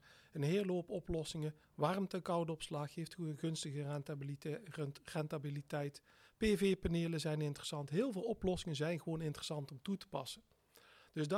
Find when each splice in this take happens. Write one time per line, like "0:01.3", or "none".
0:01.6